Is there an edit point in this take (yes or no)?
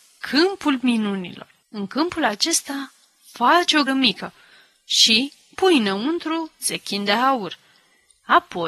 yes